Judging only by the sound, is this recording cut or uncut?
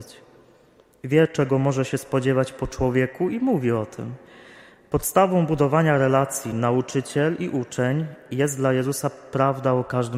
uncut